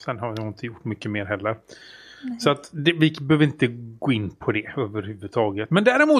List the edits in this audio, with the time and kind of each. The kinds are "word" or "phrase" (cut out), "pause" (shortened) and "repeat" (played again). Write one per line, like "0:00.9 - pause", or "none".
none